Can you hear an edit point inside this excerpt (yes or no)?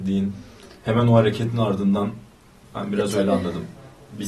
no